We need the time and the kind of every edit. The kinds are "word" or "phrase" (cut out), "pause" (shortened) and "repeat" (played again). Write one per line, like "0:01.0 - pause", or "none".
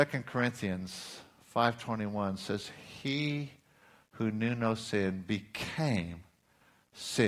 none